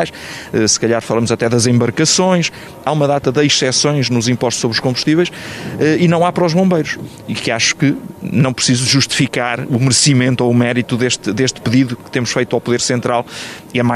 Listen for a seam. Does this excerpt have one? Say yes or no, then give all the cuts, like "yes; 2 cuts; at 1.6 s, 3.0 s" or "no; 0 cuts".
no; 0 cuts